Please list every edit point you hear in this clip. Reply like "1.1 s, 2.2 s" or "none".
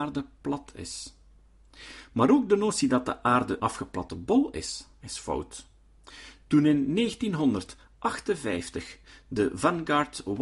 3.6 s